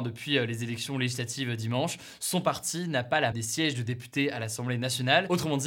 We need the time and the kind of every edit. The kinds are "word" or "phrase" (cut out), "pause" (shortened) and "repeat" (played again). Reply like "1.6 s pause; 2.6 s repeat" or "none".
3.3 s word